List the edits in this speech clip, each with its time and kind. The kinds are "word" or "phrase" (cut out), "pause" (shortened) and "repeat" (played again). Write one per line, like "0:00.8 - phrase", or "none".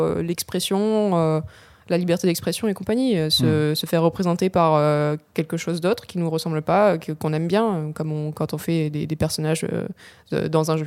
none